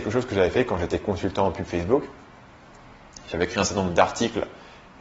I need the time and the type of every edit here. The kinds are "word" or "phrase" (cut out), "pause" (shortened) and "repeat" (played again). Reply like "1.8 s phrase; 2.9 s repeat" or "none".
none